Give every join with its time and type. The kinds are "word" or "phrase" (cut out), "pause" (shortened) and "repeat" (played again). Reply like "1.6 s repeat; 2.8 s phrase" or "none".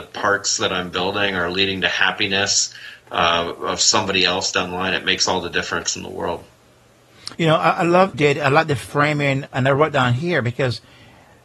7.3 s pause; 8.1 s phrase; 9.5 s word

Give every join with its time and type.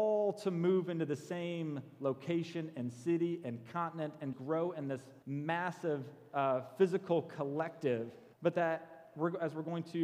4.3 s word; 5.2 s pause; 8.3 s pause

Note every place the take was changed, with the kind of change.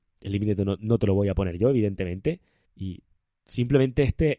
2.6 s pause

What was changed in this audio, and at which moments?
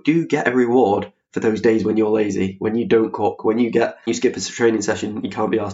4.1 s word

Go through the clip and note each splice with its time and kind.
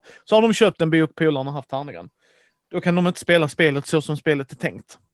none

